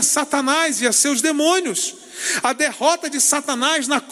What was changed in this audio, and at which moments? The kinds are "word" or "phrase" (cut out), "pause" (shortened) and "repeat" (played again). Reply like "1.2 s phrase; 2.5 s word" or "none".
none